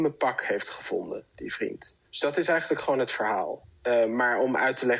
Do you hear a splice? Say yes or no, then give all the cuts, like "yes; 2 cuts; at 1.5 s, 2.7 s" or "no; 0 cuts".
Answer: yes; 1 cut; at 2.0 s